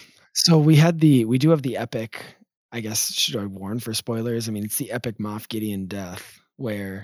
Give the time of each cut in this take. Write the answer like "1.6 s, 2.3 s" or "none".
none